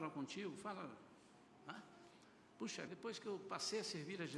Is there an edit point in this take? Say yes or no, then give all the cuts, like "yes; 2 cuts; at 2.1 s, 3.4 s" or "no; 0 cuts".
yes; 1 cut; at 2.9 s